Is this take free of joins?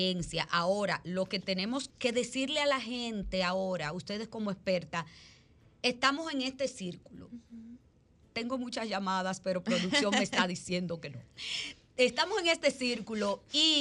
no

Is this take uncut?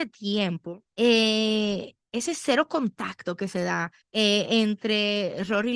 no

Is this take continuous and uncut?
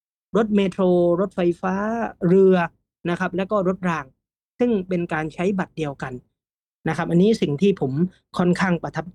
yes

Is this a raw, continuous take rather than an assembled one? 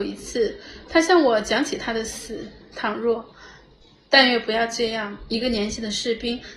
yes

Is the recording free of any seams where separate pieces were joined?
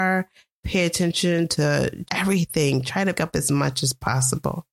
no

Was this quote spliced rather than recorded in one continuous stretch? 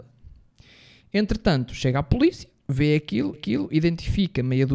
yes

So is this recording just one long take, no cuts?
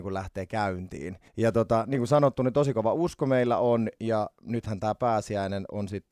no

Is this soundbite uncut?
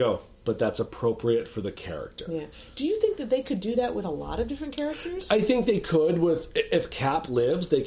yes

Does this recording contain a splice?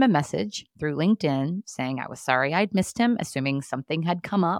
no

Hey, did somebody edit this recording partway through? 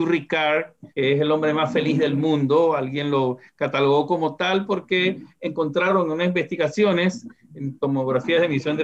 yes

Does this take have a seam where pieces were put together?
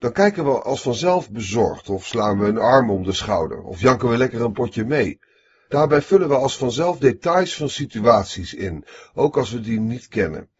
no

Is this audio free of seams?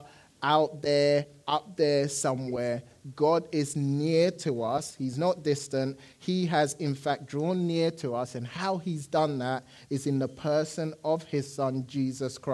yes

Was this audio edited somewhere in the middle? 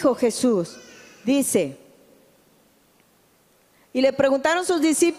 no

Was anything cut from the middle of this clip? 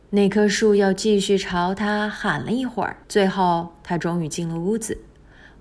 yes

